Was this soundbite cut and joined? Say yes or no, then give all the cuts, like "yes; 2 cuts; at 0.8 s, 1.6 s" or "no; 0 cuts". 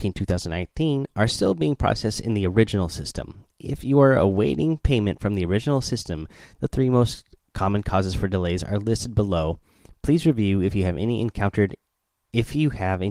no; 0 cuts